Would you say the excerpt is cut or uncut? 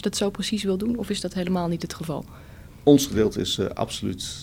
uncut